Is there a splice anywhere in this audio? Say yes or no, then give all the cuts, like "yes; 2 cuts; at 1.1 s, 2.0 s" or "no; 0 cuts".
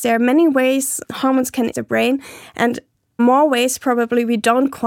yes; 3 cuts; at 1.0 s, 1.7 s, 3.2 s